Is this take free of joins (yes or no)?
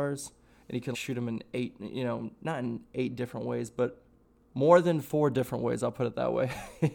no